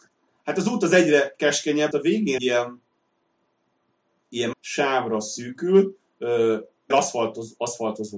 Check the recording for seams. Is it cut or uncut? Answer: cut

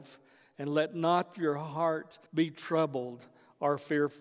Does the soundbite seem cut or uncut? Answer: cut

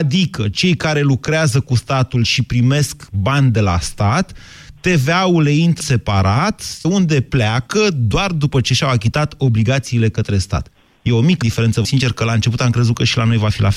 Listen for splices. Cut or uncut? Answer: cut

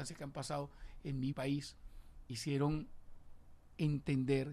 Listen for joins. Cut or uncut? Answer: cut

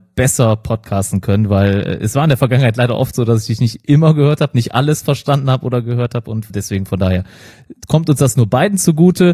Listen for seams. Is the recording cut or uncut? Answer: cut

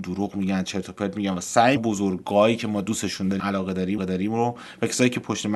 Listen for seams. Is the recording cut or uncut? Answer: cut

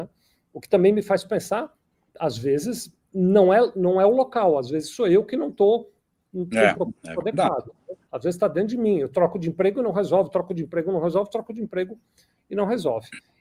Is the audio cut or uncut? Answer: uncut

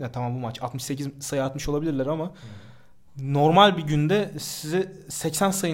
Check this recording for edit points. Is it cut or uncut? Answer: uncut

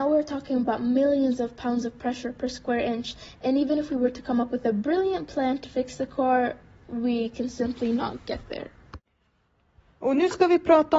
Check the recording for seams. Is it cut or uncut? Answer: uncut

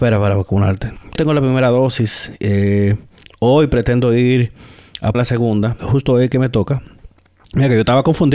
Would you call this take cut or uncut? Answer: cut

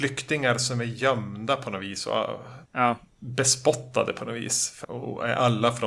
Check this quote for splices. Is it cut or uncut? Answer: cut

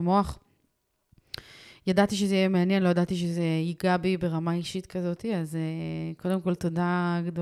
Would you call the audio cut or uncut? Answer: uncut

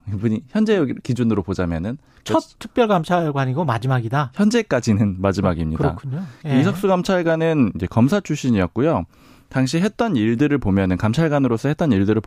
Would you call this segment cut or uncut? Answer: uncut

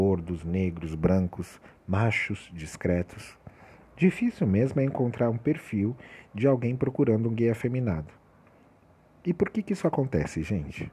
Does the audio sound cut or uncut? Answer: uncut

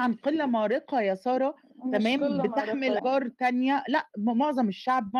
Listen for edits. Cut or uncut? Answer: cut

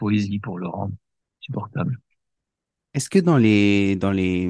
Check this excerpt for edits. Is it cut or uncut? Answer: uncut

